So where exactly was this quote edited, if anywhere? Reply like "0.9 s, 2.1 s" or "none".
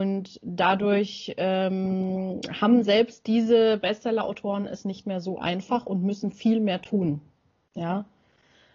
none